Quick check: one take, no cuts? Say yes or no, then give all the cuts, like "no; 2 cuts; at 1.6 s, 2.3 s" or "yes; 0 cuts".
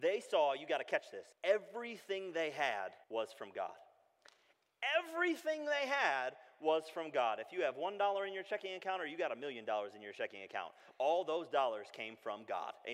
no; 2 cuts; at 1.3 s, 3.0 s